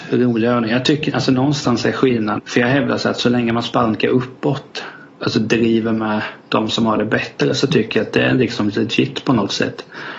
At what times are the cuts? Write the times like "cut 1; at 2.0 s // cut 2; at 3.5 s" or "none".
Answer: cut 1; at 2.4 s // cut 2; at 5.1 s // cut 3; at 6.4 s

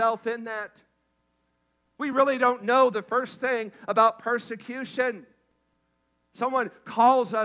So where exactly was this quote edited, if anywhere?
none

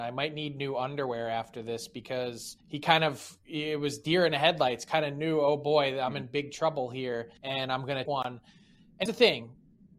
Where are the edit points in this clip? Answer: cut 1; at 2.6 s // cut 2; at 7.4 s // cut 3; at 8.1 s // cut 4; at 9.1 s

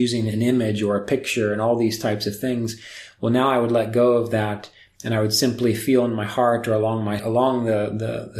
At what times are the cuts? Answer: cut 1; at 7.2 s

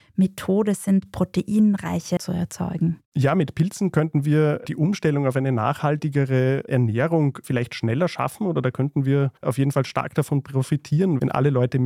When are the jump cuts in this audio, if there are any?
cut 1; at 2.2 s // cut 2; at 3.1 s // cut 3; at 9.4 s

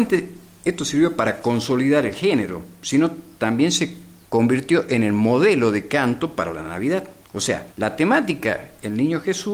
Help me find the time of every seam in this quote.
cut 1; at 4.2 s // cut 2; at 7.2 s // cut 3; at 7.7 s

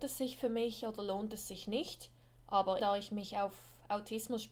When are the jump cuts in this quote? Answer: cut 1; at 2.8 s

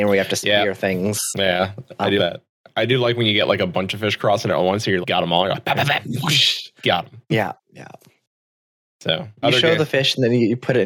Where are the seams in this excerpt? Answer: cut 1; at 2.2 s // cut 2; at 5.0 s // cut 3; at 6.8 s // cut 4; at 9.4 s

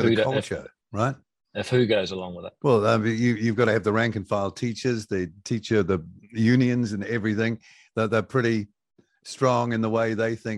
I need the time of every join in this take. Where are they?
none

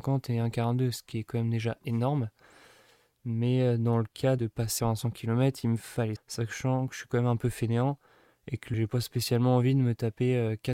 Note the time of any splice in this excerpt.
cut 1; at 4.4 s // cut 2; at 4.8 s // cut 3; at 6.2 s // cut 4; at 8.7 s

